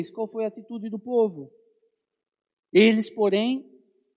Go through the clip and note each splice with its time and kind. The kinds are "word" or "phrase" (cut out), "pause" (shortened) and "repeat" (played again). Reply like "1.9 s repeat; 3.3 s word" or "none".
none